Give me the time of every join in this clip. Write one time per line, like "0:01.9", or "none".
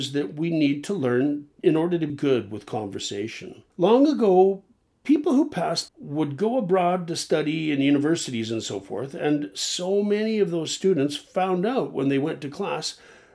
0:02.1
0:03.7
0:05.9